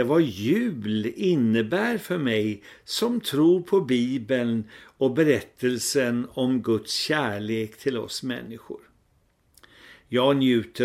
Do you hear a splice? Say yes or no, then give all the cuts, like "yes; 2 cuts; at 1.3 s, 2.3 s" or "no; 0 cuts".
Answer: no; 0 cuts